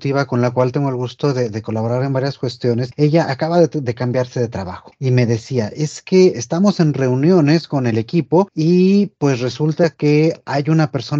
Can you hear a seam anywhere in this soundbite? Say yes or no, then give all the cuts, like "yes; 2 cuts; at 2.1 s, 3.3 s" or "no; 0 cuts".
no; 0 cuts